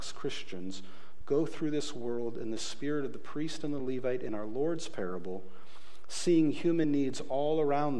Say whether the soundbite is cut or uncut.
uncut